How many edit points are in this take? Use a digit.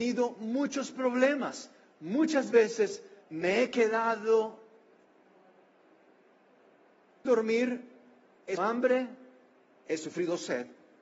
3